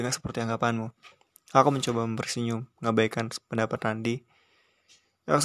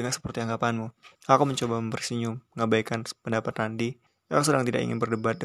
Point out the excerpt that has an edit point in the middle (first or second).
second